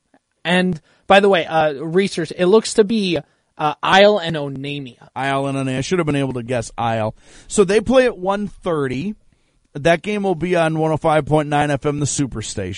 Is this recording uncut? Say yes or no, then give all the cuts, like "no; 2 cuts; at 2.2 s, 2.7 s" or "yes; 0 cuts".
yes; 0 cuts